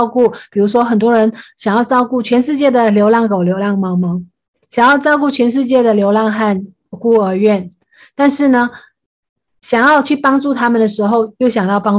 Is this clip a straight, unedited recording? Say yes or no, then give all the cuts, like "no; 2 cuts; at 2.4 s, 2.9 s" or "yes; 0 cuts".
yes; 0 cuts